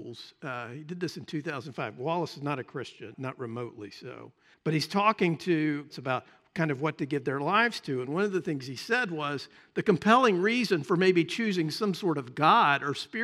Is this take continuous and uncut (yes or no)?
no